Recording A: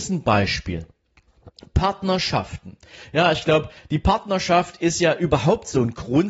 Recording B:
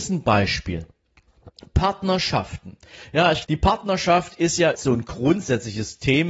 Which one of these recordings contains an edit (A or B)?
B